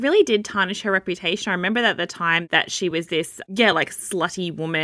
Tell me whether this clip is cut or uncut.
uncut